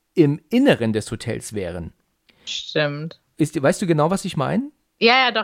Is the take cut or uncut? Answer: uncut